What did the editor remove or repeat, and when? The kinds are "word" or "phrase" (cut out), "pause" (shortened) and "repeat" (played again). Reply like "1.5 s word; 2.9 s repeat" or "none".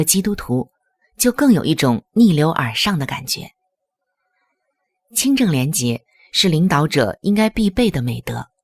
none